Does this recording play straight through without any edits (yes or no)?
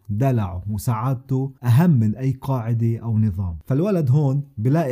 no